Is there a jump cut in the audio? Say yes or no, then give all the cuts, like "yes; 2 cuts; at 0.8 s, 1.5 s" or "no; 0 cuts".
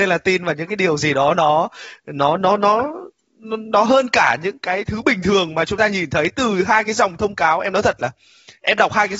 no; 0 cuts